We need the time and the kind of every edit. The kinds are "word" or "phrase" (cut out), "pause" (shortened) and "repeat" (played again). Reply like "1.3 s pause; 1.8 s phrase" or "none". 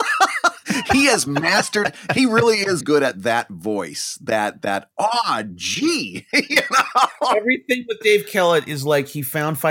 2.8 s word